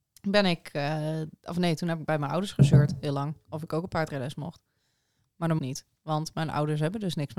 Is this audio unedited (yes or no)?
no